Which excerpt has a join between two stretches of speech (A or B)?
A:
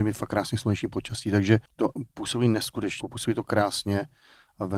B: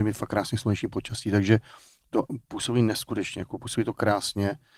A